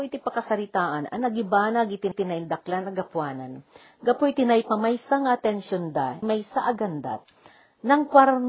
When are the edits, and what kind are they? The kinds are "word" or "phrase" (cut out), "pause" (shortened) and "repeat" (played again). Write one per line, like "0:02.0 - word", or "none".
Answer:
0:02.1 - repeat
0:06.2 - word